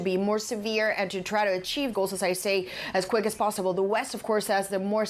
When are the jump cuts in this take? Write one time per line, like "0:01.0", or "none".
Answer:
0:01.9